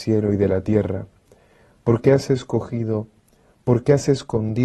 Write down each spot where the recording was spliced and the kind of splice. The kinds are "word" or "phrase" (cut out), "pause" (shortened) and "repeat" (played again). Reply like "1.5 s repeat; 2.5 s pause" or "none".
none